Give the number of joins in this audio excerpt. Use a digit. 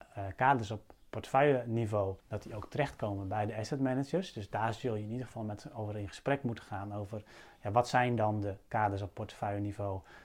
1